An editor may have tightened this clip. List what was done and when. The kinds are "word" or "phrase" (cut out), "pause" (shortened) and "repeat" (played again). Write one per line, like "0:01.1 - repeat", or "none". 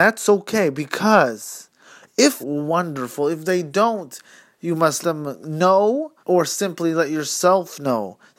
0:02.4 - phrase
0:05.0 - word
0:06.2 - pause